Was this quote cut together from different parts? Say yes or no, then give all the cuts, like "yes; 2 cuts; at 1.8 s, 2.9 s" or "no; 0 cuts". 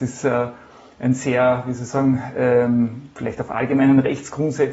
no; 0 cuts